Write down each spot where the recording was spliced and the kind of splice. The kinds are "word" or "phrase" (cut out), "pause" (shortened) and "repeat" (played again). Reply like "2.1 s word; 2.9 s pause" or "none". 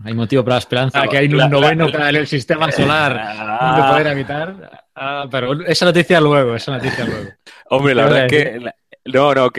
0.9 s word; 1.9 s word